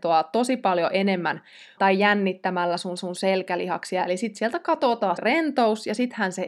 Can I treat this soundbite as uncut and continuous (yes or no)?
no